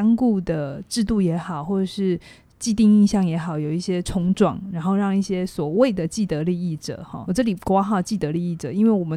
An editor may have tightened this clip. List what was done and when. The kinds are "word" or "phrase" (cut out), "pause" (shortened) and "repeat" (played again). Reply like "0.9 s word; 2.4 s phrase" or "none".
7.3 s word